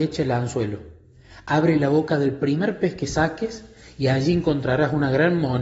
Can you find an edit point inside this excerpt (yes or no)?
no